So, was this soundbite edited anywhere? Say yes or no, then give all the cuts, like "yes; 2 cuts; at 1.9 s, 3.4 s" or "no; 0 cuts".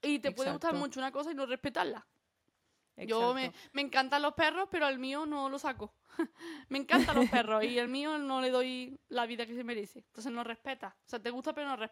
no; 0 cuts